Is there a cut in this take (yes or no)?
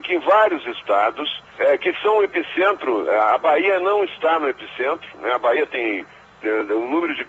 yes